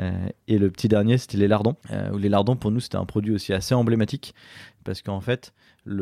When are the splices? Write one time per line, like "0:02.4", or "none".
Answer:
0:01.8